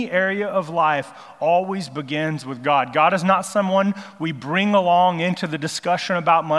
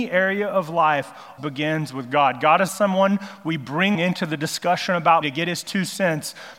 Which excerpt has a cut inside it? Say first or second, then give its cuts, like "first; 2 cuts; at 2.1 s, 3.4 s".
second; 4 cuts; at 1.4 s, 2.7 s, 3.9 s, 5.2 s